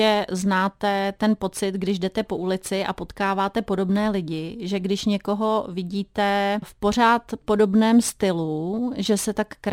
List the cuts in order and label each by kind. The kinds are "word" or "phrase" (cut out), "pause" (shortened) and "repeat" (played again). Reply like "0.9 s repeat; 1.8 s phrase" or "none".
6.6 s word